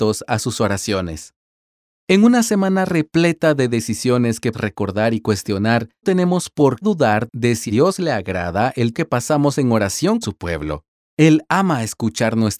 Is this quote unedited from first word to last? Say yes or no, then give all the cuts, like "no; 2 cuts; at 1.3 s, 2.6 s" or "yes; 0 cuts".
no; 6 cuts; at 4.5 s, 6.0 s, 6.8 s, 7.7 s, 8.9 s, 10.2 s